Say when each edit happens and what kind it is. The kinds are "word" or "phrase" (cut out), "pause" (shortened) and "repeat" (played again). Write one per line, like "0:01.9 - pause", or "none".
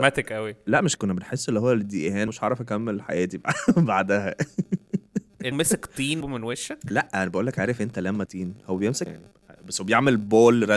0:01.0 - word
0:02.3 - word
0:05.5 - word
0:06.2 - word
0:08.3 - word
0:09.1 - word

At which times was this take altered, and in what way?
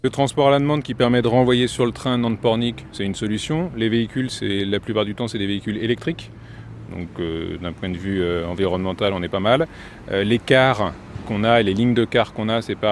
none

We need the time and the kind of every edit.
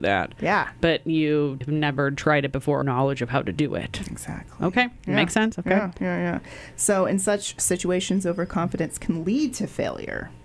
0:01.6 - word
0:02.8 - phrase

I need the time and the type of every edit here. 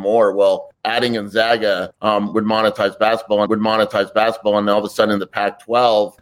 0:03.4 - repeat

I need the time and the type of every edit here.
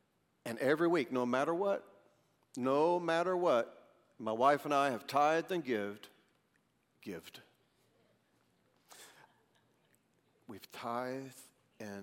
none

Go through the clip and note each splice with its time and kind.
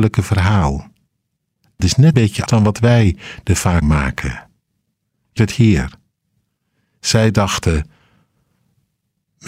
0:01.8 - word
0:02.1 - word
0:02.5 - word
0:03.8 - word
0:05.4 - word

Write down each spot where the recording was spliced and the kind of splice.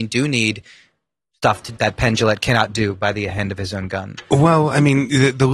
0:01.8 - word

